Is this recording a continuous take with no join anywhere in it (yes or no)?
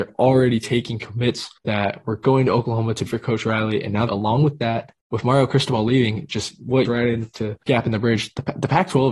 no